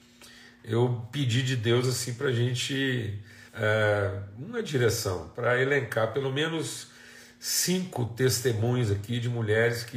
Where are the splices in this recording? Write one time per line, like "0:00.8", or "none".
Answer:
0:03.5